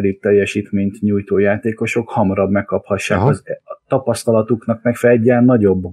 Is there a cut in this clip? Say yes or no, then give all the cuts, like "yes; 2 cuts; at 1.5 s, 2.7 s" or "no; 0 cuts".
no; 0 cuts